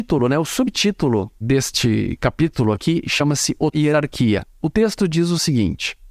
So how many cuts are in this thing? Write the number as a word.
two